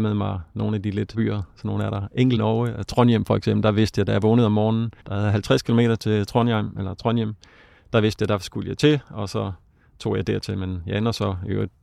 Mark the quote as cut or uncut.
cut